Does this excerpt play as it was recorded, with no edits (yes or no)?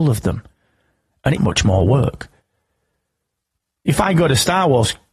no